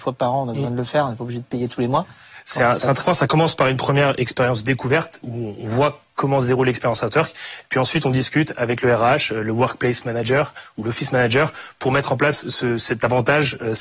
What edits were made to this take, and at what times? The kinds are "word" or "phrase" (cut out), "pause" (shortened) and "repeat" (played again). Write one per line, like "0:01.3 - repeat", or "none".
0:03.0 - word
0:05.2 - word